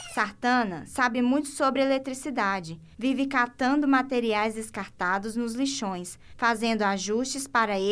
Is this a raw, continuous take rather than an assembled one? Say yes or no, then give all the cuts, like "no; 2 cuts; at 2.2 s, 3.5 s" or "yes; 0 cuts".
yes; 0 cuts